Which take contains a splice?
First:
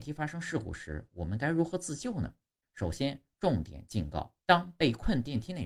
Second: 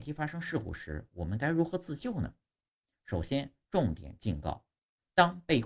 first; 2 cuts; at 2.6 s, 4.4 s

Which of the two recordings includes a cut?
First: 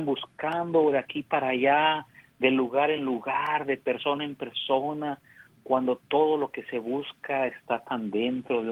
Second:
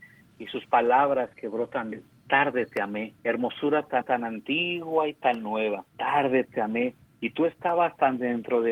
second; 6 cuts; at 1.3 s, 1.9 s, 3.2 s, 4.0 s, 5.9 s, 7.1 s

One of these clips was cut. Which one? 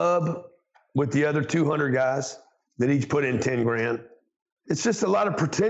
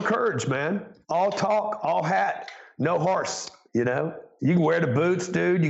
second; 1 cut; at 1.0 s

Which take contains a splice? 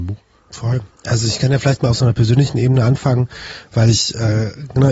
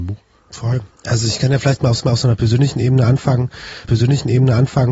second; 2 cuts; at 2.0 s, 3.8 s

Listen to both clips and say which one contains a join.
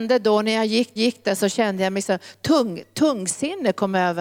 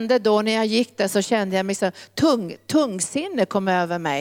first; 1 cut; at 1.0 s

